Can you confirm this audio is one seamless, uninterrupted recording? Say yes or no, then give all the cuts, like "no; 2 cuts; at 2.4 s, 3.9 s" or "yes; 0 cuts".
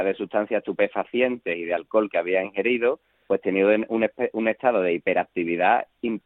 yes; 0 cuts